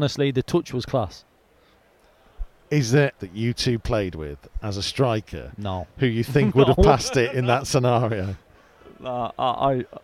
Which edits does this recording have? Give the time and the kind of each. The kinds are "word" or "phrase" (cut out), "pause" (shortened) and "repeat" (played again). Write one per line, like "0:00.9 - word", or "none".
0:03.2 - word